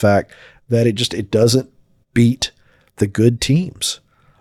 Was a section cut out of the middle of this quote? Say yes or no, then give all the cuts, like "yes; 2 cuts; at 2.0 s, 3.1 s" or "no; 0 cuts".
no; 0 cuts